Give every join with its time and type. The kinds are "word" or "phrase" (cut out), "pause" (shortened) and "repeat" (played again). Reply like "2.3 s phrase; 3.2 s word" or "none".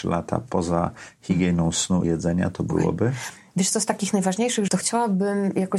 2.0 s word; 4.7 s word